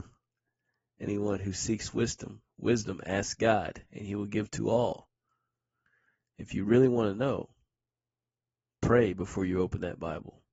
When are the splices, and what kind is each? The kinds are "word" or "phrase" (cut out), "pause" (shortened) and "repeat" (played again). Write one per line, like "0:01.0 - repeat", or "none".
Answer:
none